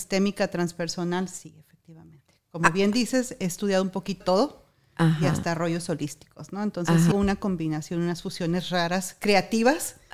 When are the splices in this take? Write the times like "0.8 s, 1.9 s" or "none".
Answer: 4.2 s, 7.1 s